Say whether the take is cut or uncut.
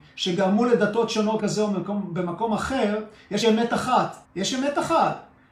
cut